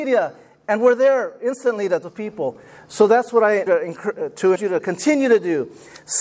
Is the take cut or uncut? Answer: cut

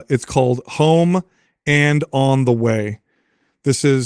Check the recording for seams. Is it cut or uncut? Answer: uncut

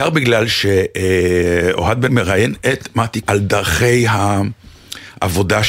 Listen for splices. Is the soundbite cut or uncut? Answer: cut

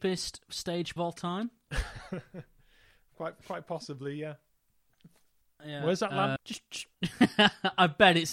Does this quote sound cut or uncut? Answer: cut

